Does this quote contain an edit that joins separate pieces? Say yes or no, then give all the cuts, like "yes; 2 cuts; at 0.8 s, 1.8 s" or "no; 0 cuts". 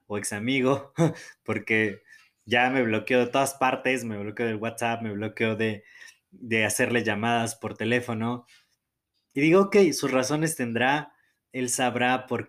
no; 0 cuts